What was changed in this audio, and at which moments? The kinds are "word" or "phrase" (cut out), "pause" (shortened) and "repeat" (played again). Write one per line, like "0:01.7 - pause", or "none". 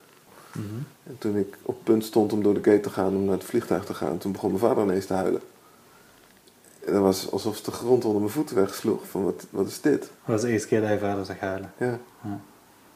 0:10.2 - pause